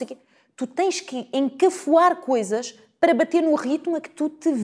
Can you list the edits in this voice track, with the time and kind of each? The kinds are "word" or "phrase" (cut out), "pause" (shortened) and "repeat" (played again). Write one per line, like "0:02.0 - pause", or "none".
none